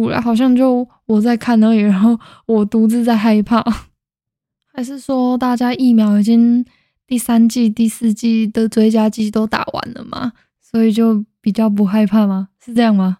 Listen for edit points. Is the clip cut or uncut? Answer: uncut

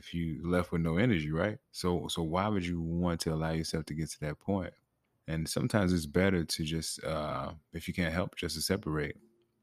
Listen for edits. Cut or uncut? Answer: cut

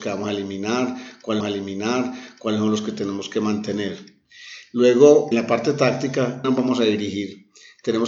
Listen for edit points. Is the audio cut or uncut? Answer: cut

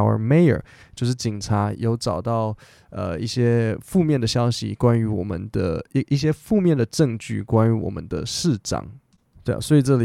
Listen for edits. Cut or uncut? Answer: uncut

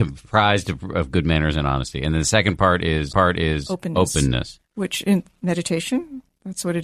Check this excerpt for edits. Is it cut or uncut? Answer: cut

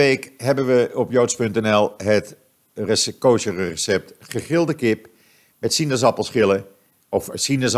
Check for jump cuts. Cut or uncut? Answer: uncut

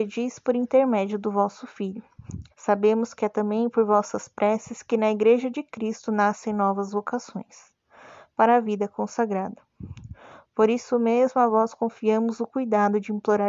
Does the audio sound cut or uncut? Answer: cut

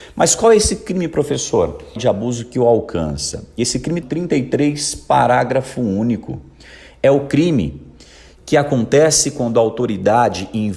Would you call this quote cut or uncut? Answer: cut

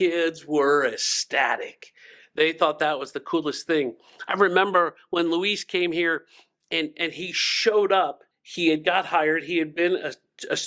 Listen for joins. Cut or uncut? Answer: cut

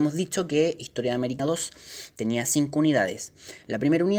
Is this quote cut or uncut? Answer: cut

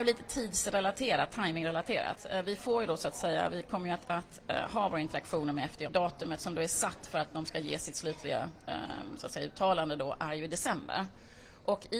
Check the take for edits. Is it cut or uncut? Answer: cut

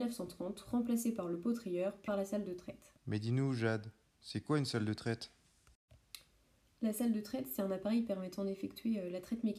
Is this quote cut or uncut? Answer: cut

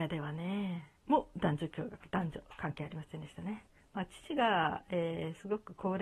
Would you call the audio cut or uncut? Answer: cut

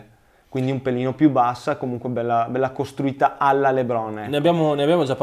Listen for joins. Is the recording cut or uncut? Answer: uncut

